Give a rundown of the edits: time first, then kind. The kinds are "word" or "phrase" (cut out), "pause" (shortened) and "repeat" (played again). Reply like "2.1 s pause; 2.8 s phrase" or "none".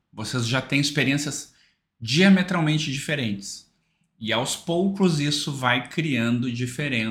none